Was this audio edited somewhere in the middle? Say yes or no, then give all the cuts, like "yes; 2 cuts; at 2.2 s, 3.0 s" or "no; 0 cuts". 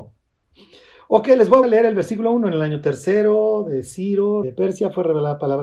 yes; 2 cuts; at 1.6 s, 4.4 s